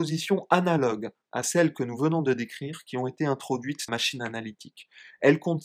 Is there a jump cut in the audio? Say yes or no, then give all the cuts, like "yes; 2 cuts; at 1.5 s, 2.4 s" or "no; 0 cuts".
yes; 1 cut; at 3.9 s